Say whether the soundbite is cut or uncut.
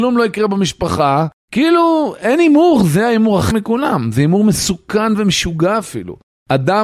cut